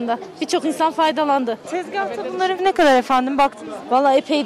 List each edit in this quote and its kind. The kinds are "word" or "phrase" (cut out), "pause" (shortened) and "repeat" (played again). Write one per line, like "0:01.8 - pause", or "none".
0:02.6 - word